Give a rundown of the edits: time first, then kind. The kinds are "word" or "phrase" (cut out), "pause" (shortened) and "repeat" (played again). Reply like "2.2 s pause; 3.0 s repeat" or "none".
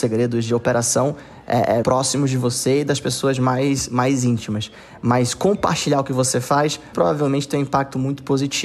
1.8 s word; 6.9 s word